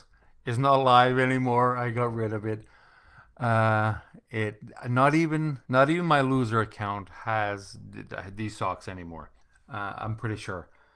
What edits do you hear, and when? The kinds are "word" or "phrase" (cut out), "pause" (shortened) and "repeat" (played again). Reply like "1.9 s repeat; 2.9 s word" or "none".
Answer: 5.6 s pause; 9.4 s pause